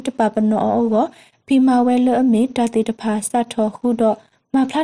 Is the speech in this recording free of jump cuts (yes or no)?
yes